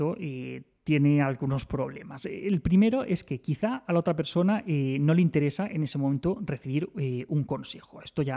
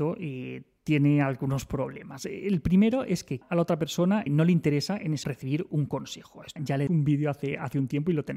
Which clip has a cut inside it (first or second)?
second